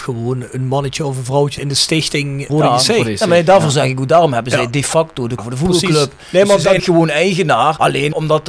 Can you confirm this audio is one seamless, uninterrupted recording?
no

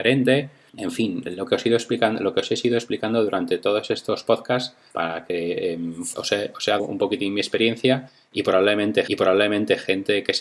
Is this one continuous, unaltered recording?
no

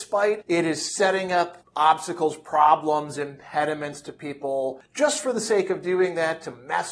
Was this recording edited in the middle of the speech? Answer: no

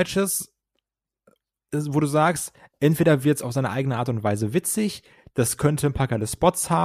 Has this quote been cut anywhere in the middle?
no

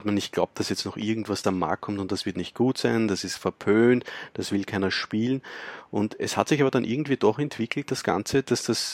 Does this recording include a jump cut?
yes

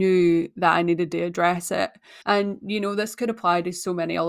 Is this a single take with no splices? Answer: no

